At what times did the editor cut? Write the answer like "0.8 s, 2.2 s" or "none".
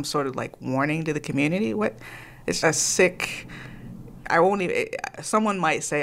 2.6 s